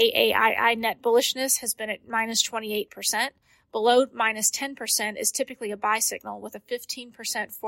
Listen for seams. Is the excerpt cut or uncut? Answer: uncut